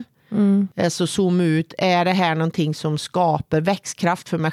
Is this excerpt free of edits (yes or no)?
yes